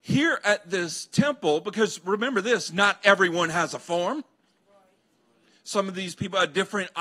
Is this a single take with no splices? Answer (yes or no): yes